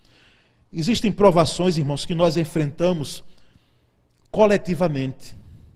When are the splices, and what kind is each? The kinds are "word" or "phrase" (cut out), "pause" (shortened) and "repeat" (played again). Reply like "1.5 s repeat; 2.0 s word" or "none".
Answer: none